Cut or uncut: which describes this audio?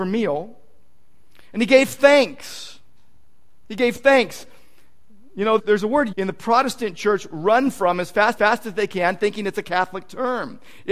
cut